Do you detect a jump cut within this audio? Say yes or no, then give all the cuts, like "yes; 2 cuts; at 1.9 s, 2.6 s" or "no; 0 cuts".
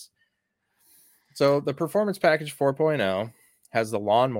no; 0 cuts